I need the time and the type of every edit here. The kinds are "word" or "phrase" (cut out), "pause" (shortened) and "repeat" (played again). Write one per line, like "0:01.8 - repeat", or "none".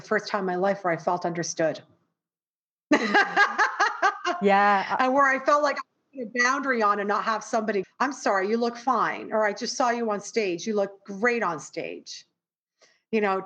0:07.8 - word